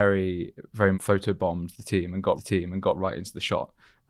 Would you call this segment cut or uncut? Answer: cut